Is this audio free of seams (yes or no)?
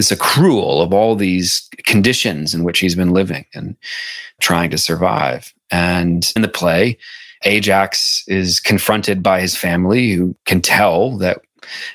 no